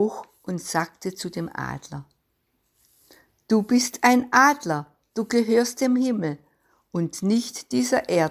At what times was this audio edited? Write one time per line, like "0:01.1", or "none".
none